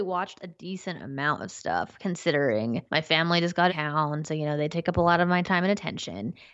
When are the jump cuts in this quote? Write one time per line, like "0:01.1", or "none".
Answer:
0:02.9
0:03.7
0:05.4